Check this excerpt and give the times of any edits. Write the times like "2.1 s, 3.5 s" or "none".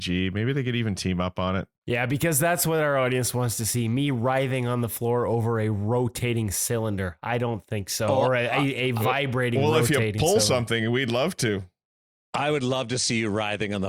none